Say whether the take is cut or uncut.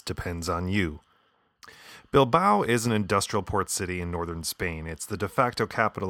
uncut